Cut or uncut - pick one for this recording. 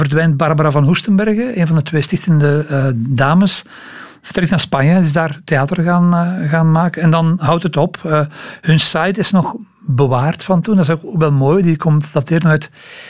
uncut